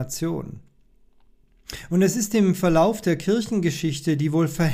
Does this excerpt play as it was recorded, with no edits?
yes; 0 cuts

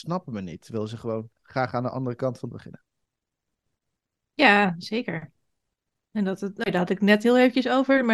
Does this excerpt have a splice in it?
yes; 3 cuts; at 1.3 s, 2.5 s, 6.6 s

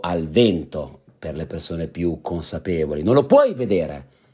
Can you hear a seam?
no; 0 cuts

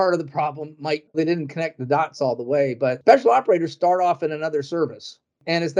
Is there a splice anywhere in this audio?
yes; 1 cut; at 1.1 s

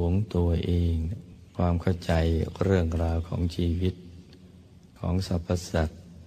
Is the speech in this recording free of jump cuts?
no; 1 cut; at 1.5 s

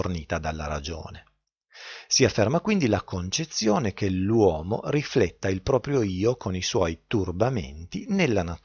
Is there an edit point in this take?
no; 0 cuts

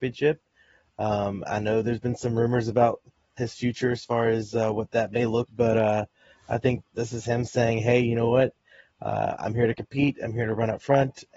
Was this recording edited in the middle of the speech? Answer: yes; 3 cuts; at 3.4 s, 5.5 s, 6.8 s

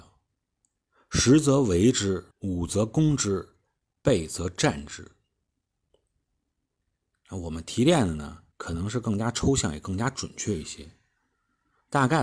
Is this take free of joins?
no; 2 cuts; at 2.3 s, 8.5 s

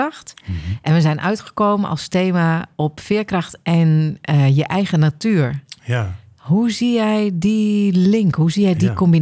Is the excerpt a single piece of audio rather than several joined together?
yes; 0 cuts

